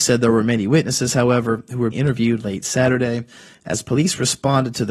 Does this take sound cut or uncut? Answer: cut